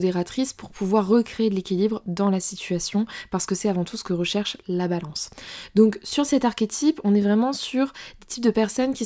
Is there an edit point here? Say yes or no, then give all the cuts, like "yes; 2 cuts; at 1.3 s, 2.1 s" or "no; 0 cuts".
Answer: no; 0 cuts